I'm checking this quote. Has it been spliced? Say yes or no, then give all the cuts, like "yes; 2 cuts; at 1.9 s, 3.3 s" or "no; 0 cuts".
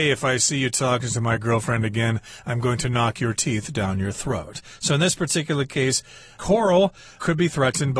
no; 0 cuts